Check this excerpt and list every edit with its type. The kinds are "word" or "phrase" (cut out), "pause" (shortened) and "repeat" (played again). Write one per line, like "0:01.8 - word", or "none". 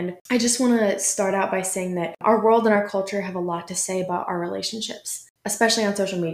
none